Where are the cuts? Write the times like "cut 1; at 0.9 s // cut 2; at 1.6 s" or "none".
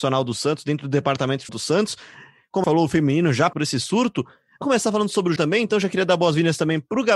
cut 1; at 1.5 s // cut 2; at 2.6 s // cut 3; at 3.5 s // cut 4; at 4.6 s // cut 5; at 5.4 s